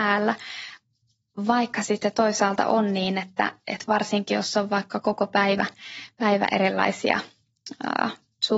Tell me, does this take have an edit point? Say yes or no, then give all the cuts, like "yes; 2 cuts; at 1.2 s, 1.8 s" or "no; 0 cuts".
no; 0 cuts